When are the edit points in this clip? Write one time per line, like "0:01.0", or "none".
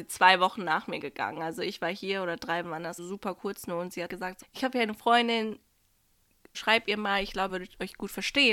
0:02.6
0:03.0
0:04.1
0:04.4
0:06.5
0:07.5

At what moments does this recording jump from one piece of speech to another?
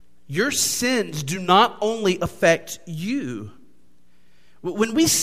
none

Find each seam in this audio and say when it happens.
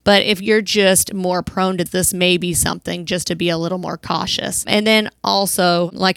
none

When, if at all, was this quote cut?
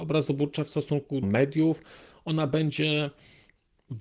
0:01.2

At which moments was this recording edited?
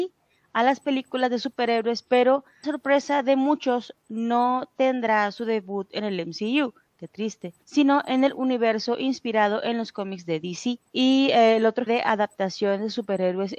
0:02.6
0:07.6
0:10.9
0:11.9

